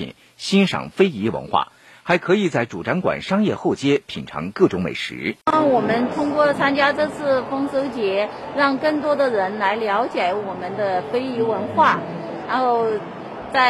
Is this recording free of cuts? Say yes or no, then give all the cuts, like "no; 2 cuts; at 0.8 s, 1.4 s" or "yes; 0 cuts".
no; 1 cut; at 5.4 s